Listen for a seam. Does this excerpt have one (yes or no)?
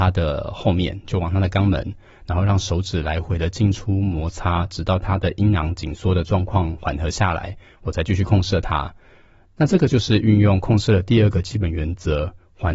no